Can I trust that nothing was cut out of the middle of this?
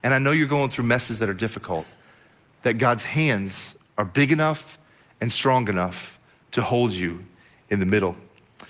yes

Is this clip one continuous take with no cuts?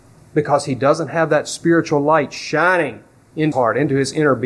no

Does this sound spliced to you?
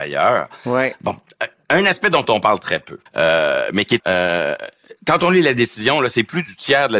yes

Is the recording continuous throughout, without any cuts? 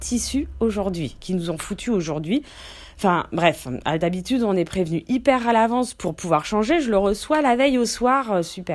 yes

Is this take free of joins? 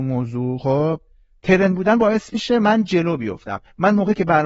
yes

